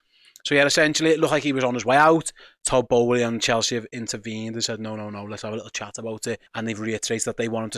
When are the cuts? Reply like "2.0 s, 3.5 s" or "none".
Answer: 6.5 s